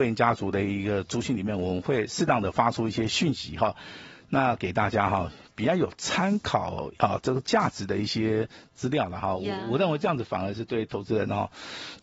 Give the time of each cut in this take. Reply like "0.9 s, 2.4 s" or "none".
7.0 s